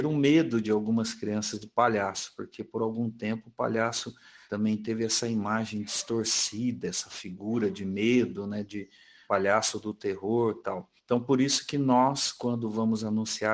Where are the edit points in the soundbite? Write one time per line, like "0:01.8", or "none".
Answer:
none